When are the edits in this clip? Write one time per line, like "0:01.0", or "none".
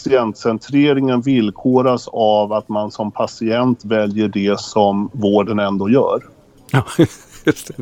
none